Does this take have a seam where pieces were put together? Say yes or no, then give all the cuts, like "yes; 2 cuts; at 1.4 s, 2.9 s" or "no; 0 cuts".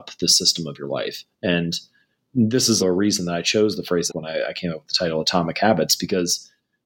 yes; 2 cuts; at 2.8 s, 4.1 s